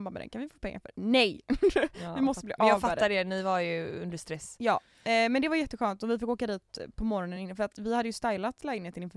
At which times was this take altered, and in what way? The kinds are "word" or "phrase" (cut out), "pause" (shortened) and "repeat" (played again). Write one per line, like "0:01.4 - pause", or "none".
none